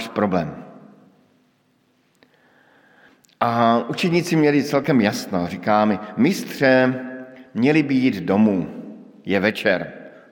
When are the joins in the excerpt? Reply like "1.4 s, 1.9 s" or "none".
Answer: none